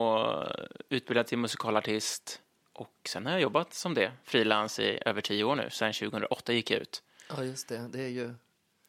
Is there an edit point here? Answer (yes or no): no